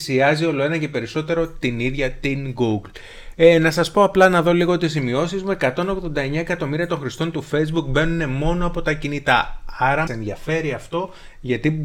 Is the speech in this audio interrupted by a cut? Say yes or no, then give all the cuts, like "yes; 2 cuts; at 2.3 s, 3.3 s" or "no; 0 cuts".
yes; 1 cut; at 10.1 s